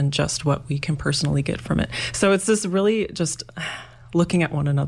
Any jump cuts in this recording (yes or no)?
no